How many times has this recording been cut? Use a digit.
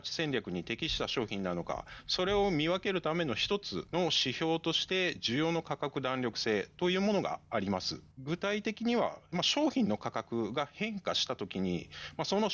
1